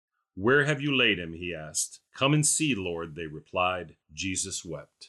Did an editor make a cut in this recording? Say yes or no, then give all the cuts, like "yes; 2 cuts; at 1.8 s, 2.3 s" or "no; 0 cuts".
yes; 2 cuts; at 2.1 s, 4.0 s